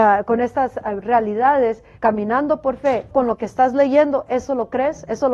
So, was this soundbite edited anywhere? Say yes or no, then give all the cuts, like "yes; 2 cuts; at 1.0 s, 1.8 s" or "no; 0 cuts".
yes; 2 cuts; at 1.9 s, 3.1 s